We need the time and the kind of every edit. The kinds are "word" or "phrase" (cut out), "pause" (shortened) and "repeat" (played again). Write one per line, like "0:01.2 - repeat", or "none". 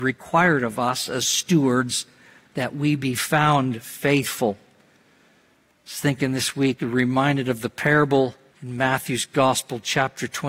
0:08.5 - pause